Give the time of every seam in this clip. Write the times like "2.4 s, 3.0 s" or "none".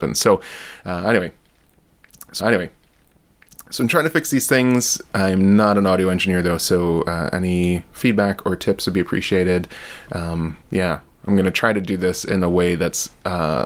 2.4 s, 10.6 s